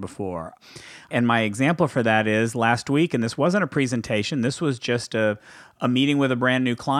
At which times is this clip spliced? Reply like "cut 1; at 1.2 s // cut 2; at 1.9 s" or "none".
none